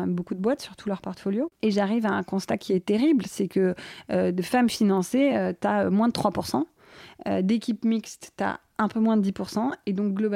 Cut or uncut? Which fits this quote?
uncut